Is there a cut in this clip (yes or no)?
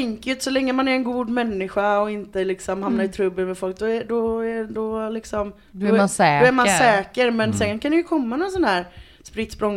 no